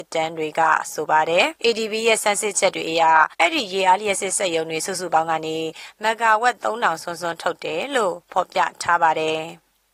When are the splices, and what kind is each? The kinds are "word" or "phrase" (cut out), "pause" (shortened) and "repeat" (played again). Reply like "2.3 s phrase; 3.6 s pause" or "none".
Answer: 1.6 s pause; 3.3 s pause